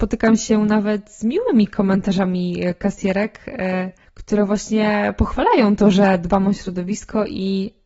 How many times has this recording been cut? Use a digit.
1